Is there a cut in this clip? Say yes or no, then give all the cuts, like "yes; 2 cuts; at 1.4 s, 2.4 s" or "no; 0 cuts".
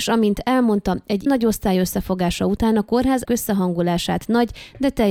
yes; 2 cuts; at 1.3 s, 3.3 s